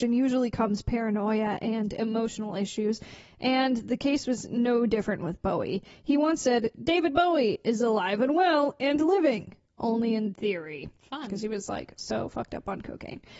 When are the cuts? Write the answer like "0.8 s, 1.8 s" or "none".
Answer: none